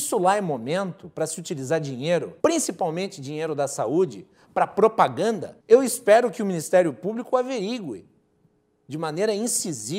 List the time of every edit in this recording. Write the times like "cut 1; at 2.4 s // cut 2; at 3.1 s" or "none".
cut 1; at 2.4 s // cut 2; at 5.6 s